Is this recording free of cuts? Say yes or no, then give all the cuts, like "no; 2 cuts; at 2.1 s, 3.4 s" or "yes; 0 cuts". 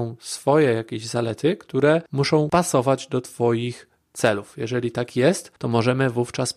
no; 2 cuts; at 2.1 s, 5.6 s